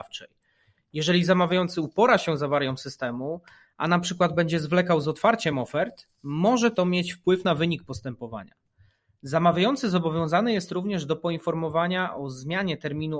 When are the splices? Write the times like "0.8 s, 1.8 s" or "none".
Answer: none